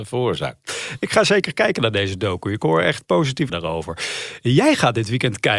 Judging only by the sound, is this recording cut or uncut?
cut